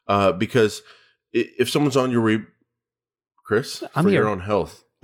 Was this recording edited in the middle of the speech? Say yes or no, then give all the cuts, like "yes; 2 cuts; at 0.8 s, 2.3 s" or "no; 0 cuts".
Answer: no; 0 cuts